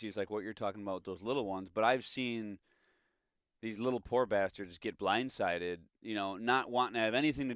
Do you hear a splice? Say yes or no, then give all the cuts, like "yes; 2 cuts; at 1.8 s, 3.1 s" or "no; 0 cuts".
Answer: no; 0 cuts